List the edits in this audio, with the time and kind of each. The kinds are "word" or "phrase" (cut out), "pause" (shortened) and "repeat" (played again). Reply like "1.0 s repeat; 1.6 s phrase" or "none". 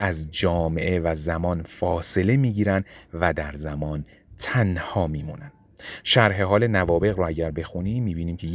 none